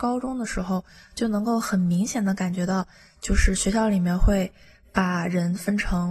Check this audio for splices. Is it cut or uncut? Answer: uncut